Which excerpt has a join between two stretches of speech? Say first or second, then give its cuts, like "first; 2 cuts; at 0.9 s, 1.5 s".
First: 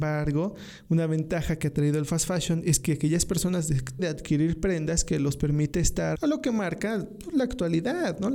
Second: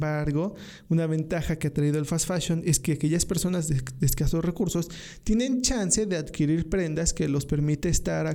first; 2 cuts; at 4.0 s, 6.1 s